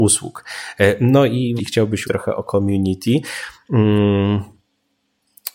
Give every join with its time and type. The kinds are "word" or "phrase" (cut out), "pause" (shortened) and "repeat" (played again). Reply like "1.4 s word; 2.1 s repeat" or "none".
1.6 s phrase; 2.0 s word